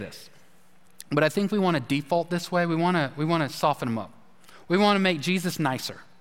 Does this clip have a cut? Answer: no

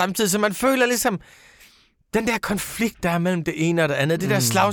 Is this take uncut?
yes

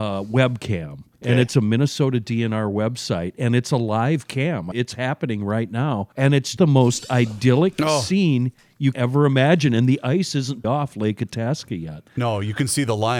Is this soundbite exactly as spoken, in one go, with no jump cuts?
no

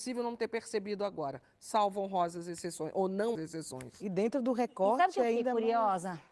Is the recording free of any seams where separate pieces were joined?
no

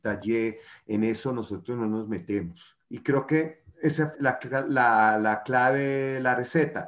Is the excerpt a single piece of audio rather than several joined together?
no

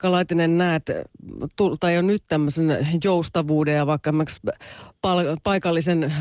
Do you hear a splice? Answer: yes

